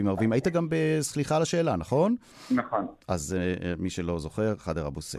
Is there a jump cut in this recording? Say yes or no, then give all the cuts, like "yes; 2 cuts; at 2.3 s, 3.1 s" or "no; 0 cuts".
yes; 1 cut; at 3.0 s